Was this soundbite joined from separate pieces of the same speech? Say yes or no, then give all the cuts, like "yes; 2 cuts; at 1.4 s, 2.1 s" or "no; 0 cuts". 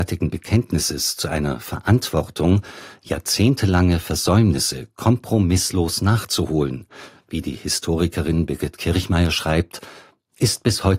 no; 0 cuts